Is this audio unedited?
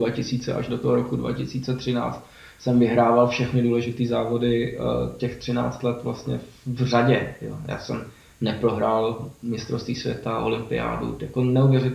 yes; 0 cuts

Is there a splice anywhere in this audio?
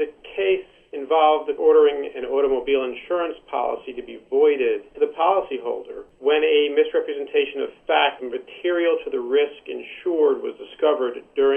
yes; 3 cuts; at 1.6 s, 4.9 s, 8.2 s

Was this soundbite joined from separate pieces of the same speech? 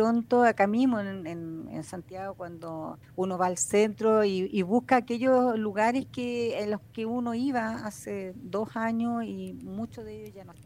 yes; 1 cut; at 3.0 s

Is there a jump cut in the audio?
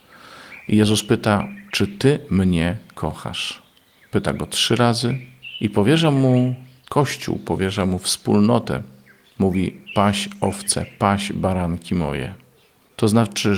no; 0 cuts

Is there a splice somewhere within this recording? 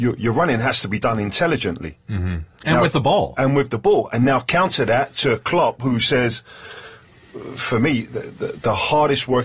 no; 0 cuts

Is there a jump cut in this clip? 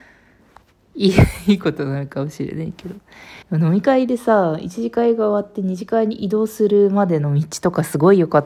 yes; 1 cut; at 3.4 s

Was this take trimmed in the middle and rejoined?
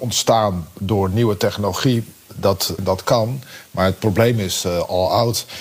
yes; 1 cut; at 2.8 s

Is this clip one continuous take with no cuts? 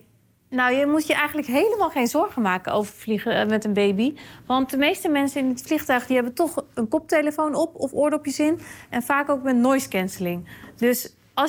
yes; 0 cuts

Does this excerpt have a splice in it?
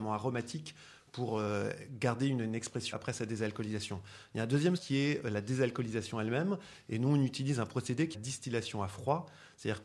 yes; 3 cuts; at 2.9 s, 4.8 s, 8.1 s

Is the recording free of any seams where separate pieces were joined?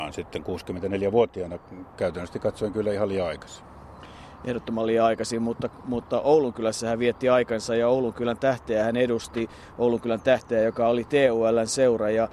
yes; 0 cuts

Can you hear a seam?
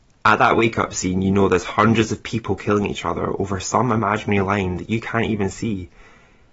no; 0 cuts

